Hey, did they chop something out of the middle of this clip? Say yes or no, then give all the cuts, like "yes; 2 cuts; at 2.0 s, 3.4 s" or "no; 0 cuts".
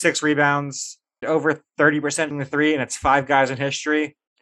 yes; 2 cuts; at 1.2 s, 2.3 s